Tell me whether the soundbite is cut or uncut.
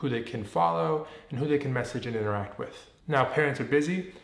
uncut